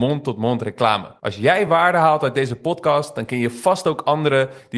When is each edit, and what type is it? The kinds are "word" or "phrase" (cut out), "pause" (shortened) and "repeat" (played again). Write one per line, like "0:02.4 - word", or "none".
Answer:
none